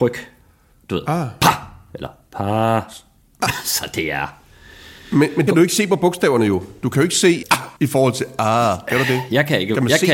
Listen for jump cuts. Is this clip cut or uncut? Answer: cut